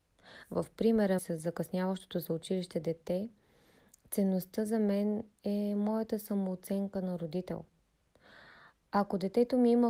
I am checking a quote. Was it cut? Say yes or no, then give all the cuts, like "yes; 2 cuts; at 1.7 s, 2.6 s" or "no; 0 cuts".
yes; 1 cut; at 1.2 s